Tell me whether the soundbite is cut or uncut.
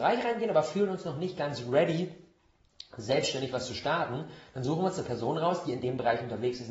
uncut